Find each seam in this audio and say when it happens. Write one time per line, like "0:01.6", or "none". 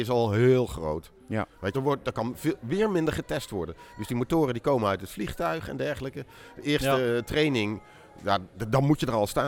0:01.7